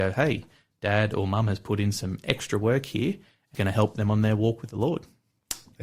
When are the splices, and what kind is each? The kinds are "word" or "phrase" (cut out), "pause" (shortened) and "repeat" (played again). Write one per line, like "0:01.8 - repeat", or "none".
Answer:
0:03.5 - word